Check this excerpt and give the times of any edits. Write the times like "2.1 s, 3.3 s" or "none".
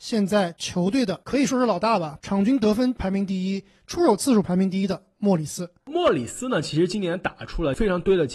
none

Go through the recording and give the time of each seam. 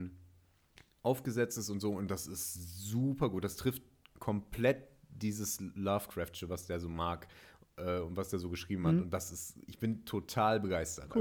none

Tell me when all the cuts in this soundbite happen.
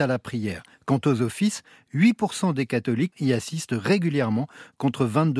3.1 s

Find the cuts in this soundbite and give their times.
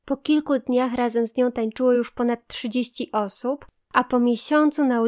none

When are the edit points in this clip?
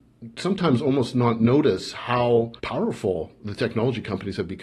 2.6 s

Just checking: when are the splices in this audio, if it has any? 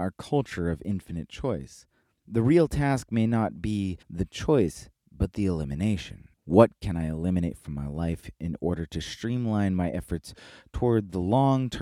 2.0 s, 4.0 s, 5.0 s, 6.3 s

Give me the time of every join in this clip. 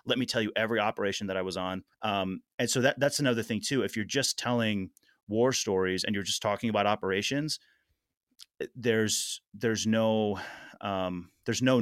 1.9 s

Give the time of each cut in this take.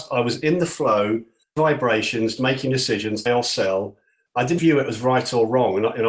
1.6 s, 2.4 s, 3.3 s, 4.6 s

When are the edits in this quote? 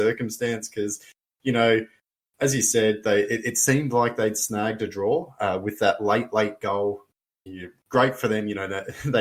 none

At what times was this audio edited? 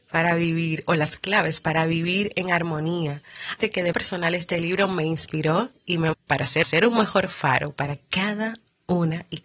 3.6 s, 3.9 s, 6.1 s, 6.6 s

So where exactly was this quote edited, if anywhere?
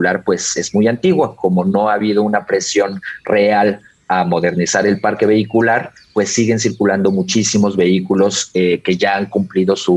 none

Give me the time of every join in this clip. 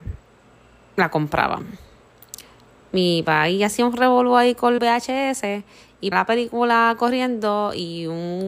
4.8 s, 6.1 s

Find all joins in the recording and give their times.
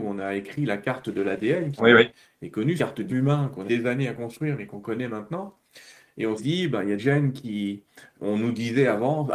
1.8 s, 2.8 s, 3.1 s, 3.7 s, 6.4 s, 7.0 s, 8.2 s

